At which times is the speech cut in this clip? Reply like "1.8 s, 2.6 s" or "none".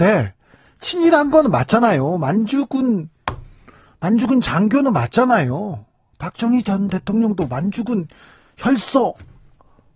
none